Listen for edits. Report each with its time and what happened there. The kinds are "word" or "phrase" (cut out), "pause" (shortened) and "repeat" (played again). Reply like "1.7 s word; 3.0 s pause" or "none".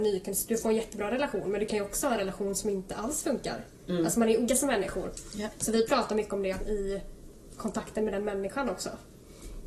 4.5 s word; 6.6 s phrase